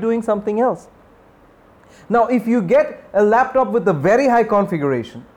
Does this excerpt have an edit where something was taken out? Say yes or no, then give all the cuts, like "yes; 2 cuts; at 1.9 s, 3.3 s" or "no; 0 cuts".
no; 0 cuts